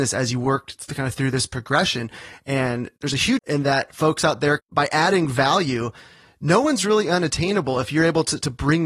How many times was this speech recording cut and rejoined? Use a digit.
2